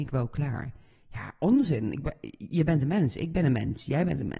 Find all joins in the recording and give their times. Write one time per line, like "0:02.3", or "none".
none